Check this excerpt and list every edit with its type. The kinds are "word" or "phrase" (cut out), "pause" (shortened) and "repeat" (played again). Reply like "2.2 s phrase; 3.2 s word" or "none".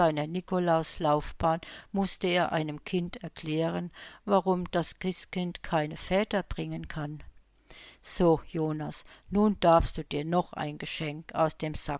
none